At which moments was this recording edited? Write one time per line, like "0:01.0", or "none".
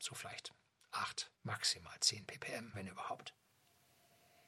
0:01.4
0:02.7